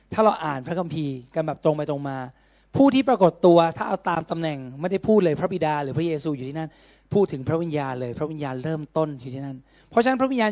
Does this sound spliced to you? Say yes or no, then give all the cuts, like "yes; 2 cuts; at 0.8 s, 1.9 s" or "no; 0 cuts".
no; 0 cuts